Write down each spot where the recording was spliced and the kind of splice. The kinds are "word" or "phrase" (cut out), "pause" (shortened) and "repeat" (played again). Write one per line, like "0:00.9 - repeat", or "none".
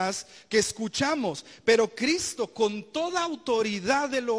none